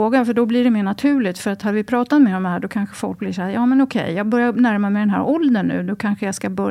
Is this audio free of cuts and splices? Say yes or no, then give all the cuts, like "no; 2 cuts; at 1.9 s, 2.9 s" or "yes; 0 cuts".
yes; 0 cuts